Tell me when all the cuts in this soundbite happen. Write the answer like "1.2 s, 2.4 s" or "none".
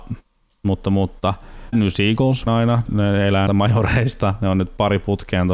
1.7 s, 2.5 s, 2.9 s, 3.5 s